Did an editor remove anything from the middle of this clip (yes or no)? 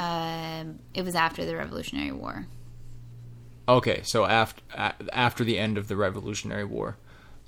no